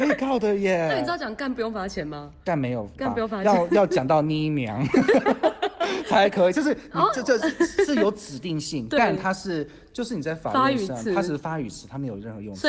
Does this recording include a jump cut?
yes; 1 cut; at 3.0 s

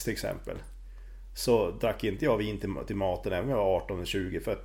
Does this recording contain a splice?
no; 0 cuts

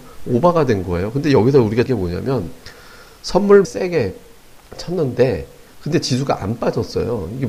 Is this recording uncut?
no; 3 cuts; at 1.9 s, 3.6 s, 4.6 s

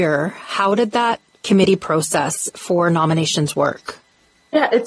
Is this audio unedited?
yes; 0 cuts

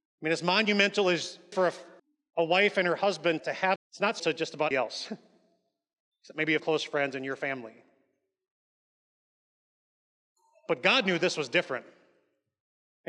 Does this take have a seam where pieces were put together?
yes; 7 cuts; at 1.5 s, 2.0 s, 3.4 s, 3.8 s, 4.2 s, 4.7 s, 6.6 s

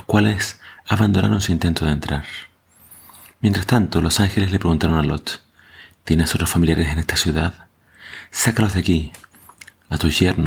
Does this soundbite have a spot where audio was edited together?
no; 0 cuts

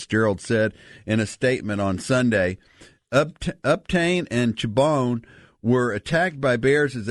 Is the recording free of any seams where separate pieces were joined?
yes; 0 cuts

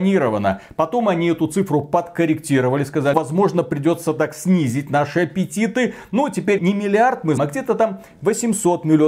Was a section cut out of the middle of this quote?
yes; 3 cuts; at 3.1 s, 6.6 s, 7.4 s

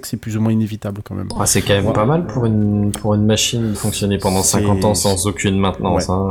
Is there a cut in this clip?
yes; 1 cut; at 3.7 s

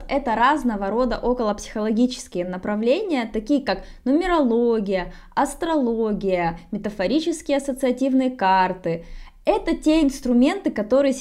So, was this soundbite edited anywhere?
no; 0 cuts

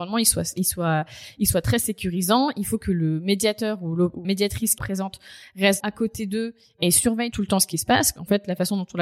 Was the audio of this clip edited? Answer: yes; 4 cuts; at 4.2 s, 4.8 s, 5.8 s, 7.3 s

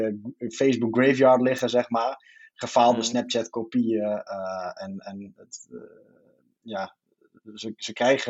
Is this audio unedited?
yes; 0 cuts

